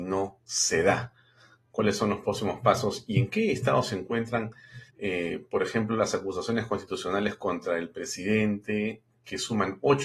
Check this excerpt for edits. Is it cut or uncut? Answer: cut